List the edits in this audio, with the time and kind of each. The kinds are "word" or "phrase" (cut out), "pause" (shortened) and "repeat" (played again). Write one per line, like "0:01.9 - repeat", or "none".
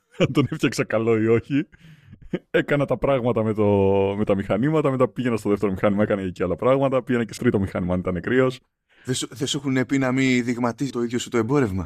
0:07.4 - word
0:10.9 - word